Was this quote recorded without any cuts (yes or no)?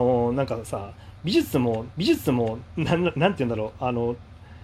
no